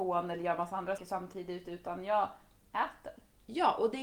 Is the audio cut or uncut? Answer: cut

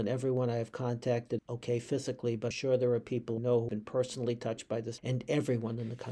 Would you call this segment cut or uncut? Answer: cut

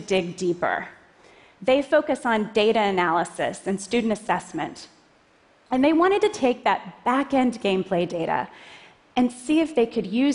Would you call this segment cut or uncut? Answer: uncut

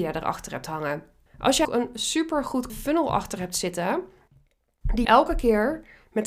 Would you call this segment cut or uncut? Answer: cut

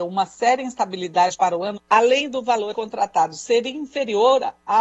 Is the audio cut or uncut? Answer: cut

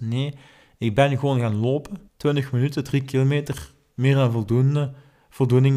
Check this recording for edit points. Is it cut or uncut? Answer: cut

